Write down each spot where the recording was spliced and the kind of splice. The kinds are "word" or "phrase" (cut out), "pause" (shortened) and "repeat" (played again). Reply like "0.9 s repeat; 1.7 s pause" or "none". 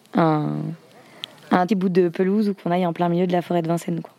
1.7 s phrase